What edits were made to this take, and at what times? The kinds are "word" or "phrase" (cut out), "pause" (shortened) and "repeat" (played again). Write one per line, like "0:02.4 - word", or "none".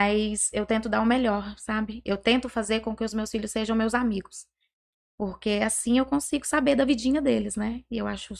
none